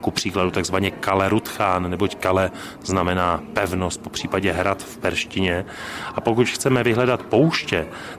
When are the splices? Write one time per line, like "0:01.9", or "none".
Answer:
none